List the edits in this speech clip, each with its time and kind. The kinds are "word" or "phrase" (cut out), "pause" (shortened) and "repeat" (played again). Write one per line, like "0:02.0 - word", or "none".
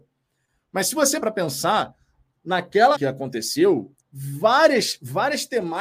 0:01.2 - word
0:02.9 - word
0:04.0 - pause

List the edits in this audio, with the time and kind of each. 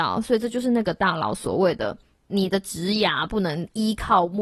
0:02.2 - pause

